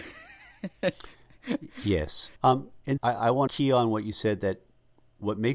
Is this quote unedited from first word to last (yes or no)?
no